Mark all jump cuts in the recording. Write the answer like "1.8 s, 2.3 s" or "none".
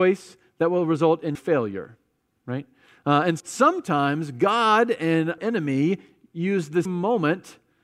1.3 s, 3.4 s, 5.4 s, 6.9 s